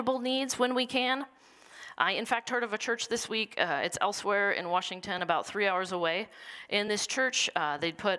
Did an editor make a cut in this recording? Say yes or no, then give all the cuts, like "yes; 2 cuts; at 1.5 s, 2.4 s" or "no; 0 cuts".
no; 0 cuts